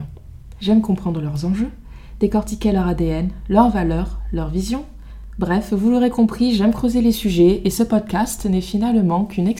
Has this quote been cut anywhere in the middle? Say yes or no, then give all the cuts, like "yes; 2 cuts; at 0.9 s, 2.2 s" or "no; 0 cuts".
no; 0 cuts